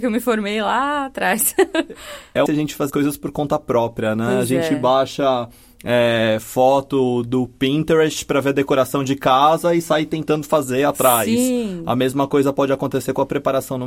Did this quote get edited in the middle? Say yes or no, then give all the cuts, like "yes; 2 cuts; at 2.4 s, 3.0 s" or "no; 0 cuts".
yes; 2 cuts; at 2.5 s, 2.9 s